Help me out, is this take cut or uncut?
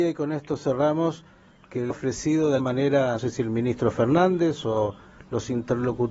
cut